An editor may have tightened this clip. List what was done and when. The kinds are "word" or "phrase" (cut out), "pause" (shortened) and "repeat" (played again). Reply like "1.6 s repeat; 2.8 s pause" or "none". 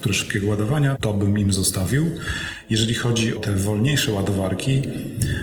1.0 s word; 3.4 s word